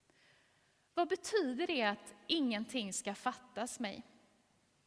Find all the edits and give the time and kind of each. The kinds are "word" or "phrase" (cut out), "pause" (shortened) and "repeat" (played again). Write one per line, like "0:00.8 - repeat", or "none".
none